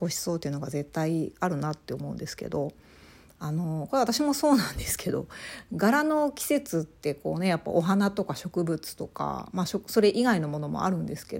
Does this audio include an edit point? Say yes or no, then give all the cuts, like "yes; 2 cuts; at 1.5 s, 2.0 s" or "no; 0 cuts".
no; 0 cuts